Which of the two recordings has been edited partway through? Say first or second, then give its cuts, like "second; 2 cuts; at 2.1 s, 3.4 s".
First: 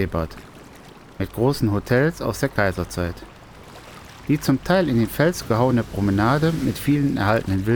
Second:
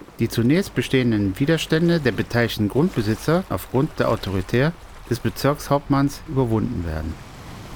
second; 2 cuts; at 3.5 s, 6.3 s